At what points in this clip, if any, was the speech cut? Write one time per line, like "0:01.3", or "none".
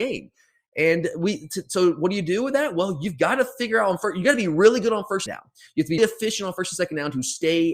0:05.3
0:06.0

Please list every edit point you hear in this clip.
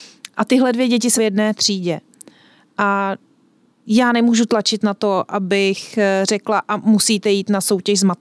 0:01.2

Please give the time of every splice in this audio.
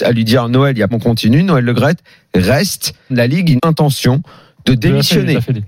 0:00.9
0:03.1
0:03.6

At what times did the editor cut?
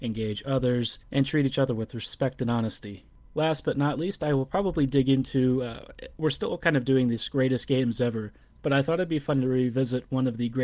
0:01.0

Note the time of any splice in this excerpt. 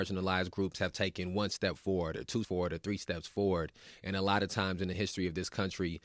0:02.4

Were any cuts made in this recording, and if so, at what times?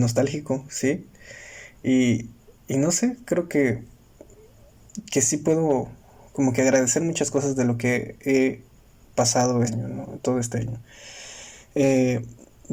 0:09.7

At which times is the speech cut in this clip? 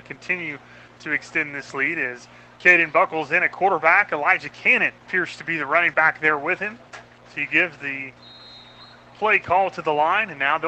0:05.0
0:05.9
0:06.9

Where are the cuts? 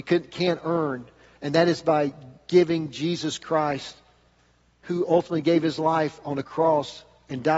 none

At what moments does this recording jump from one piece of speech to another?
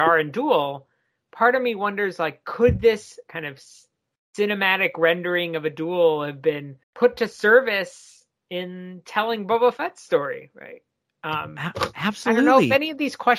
0:06.8

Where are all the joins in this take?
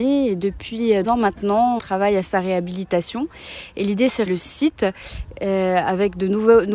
0:01.0
0:01.8
0:04.3

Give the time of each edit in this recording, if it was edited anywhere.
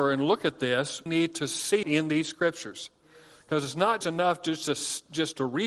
0:01.1
0:01.8
0:04.0

